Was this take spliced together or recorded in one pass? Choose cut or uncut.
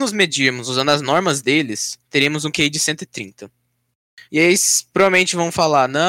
cut